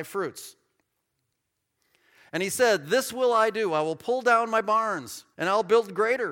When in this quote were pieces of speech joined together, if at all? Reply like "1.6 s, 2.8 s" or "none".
5.3 s